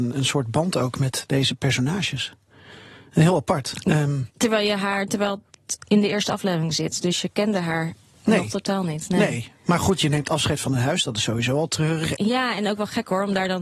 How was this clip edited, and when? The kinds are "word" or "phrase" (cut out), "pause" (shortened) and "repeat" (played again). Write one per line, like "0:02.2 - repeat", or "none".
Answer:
none